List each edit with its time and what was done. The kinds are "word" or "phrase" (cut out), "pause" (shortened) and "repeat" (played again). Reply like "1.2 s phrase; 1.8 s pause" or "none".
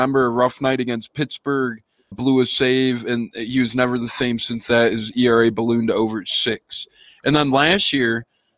2.1 s word